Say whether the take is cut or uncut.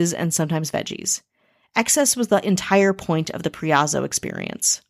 uncut